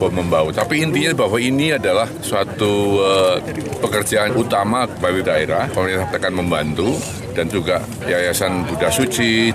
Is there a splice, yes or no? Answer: yes